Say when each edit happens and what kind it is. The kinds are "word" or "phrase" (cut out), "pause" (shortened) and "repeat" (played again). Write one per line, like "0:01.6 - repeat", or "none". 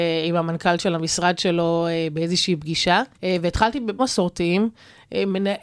0:03.1 - pause
0:04.0 - phrase